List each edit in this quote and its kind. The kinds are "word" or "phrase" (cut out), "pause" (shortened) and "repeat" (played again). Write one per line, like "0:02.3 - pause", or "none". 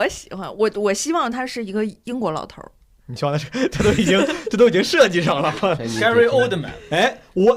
none